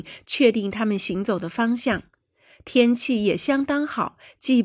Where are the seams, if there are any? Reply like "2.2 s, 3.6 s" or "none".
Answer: none

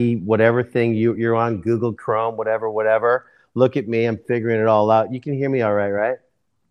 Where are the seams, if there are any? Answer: none

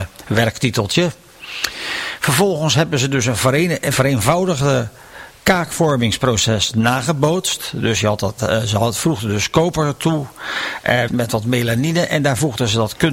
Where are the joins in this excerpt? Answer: 11.1 s

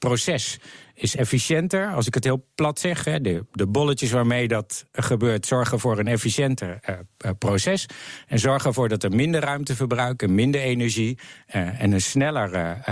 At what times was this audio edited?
none

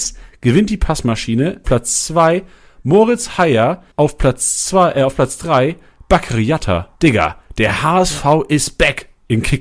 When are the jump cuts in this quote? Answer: 1.6 s, 3.9 s, 6.9 s

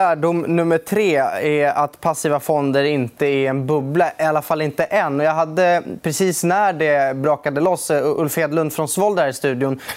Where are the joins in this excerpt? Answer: none

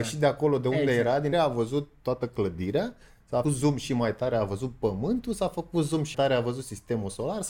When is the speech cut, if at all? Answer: 1.3 s, 3.4 s, 6.1 s

